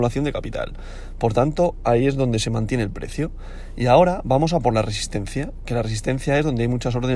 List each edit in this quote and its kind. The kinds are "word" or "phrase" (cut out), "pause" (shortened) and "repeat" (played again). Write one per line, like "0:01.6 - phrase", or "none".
none